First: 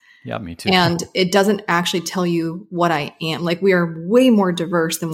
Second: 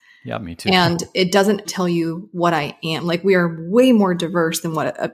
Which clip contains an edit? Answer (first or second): second